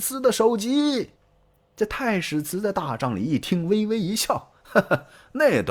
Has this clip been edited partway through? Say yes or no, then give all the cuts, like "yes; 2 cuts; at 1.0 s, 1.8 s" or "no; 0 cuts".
yes; 1 cut; at 1.2 s